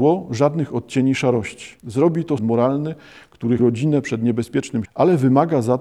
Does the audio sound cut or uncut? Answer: cut